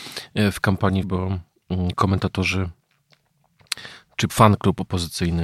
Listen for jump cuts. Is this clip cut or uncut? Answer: cut